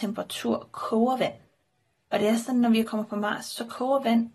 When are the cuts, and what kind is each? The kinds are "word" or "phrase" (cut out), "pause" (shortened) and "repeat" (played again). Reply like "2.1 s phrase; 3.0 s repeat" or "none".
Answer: none